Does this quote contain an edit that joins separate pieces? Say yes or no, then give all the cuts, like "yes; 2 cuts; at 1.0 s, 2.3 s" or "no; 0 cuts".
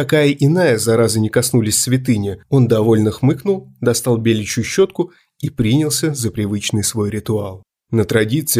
no; 0 cuts